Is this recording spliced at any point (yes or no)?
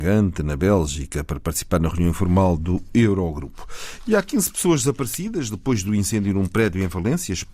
no